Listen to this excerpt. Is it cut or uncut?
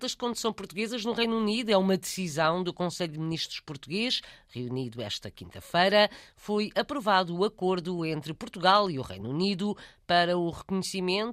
uncut